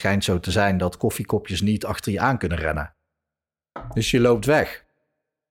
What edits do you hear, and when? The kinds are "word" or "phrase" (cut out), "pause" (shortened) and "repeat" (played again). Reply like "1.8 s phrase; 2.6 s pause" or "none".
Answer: none